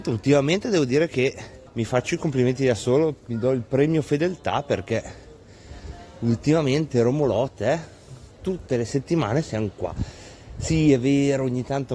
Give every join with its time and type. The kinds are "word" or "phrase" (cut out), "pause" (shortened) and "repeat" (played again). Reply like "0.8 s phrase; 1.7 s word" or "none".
1.7 s pause; 8.3 s pause